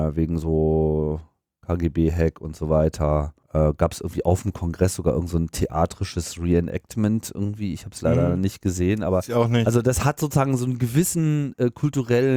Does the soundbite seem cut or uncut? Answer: cut